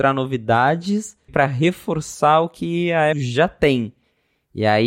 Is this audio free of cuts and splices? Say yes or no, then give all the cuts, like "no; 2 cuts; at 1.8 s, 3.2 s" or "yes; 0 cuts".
no; 2 cuts; at 1.3 s, 3.1 s